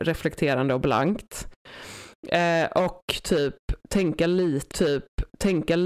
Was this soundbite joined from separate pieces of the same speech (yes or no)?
yes